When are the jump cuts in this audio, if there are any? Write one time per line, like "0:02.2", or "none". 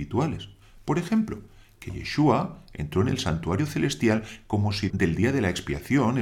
0:04.9